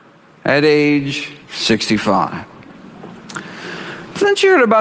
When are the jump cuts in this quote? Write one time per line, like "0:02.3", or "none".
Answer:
0:01.4